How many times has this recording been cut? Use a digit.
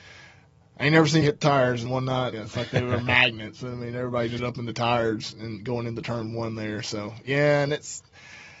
4